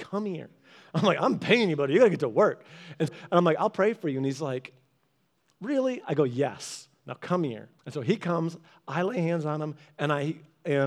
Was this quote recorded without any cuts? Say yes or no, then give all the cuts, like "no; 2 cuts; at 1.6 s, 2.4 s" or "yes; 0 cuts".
no; 2 cuts; at 3.1 s, 7.8 s